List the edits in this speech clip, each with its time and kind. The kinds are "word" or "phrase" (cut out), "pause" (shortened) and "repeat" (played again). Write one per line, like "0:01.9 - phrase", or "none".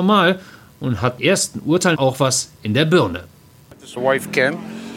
0:01.2 - word
0:01.9 - word
0:04.0 - word